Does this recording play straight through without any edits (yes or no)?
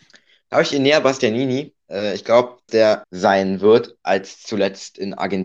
no